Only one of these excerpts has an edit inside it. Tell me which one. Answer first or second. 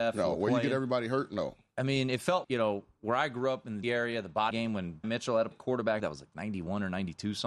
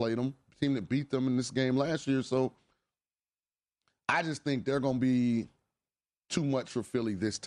first